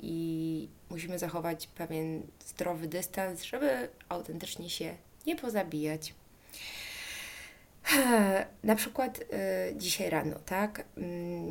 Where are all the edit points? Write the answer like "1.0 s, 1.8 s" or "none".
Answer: none